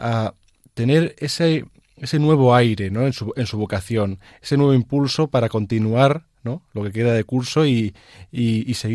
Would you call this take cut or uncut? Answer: uncut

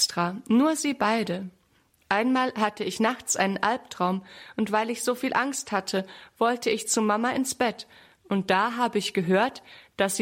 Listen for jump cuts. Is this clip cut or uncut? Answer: uncut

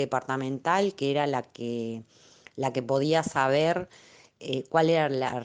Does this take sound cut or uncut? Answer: uncut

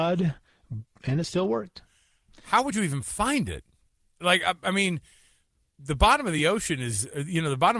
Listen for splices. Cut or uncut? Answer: uncut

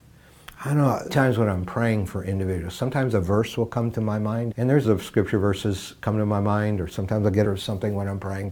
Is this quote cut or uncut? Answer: cut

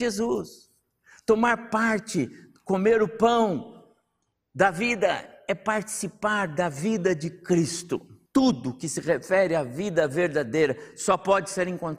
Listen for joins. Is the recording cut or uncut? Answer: cut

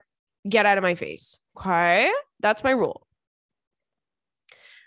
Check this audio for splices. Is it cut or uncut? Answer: cut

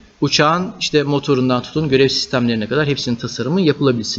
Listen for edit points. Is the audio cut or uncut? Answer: uncut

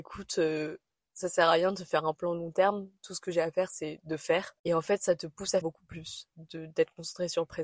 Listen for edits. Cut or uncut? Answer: cut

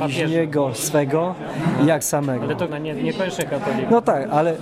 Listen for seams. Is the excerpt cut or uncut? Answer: cut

